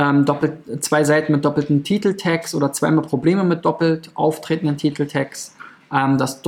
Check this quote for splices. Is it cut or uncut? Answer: uncut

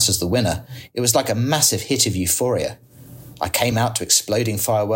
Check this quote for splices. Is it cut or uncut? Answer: uncut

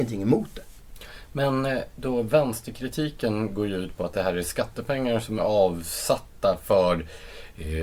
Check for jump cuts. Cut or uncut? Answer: uncut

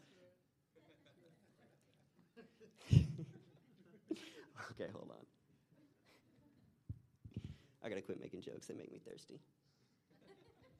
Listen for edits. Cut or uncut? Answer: uncut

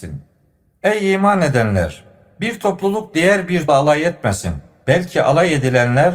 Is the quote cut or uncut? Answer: cut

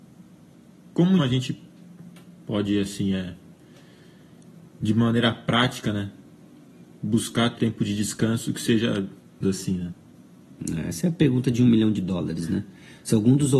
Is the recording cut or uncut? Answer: cut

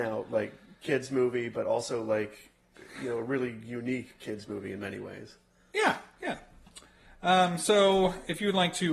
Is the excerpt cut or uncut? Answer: uncut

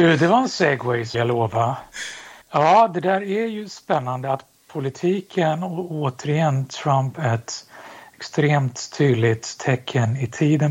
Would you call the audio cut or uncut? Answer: cut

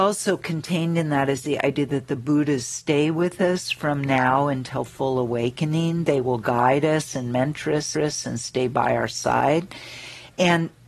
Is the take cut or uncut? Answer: cut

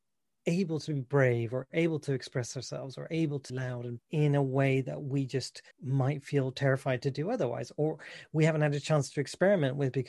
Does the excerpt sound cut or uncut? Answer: cut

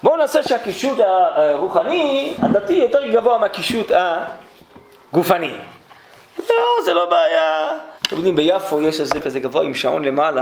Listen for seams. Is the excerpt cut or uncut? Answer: cut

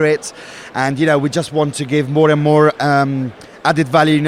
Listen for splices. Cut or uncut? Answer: uncut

